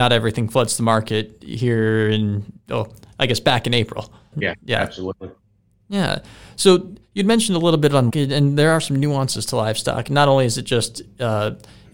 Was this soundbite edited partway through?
yes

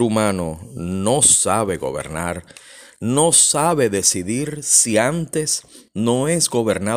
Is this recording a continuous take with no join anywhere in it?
yes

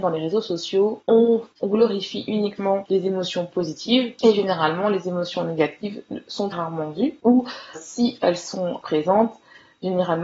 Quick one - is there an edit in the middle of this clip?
yes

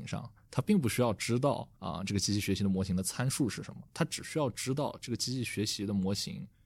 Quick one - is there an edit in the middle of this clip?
yes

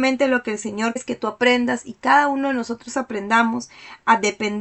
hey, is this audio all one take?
no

